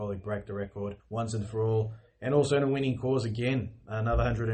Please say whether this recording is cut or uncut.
cut